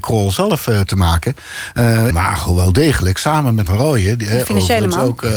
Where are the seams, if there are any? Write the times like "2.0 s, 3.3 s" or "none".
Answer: 2.1 s, 3.7 s